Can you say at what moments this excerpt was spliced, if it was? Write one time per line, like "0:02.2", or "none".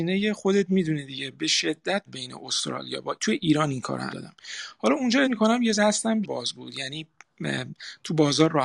0:02.1
0:03.2
0:04.1
0:05.2
0:05.7
0:06.2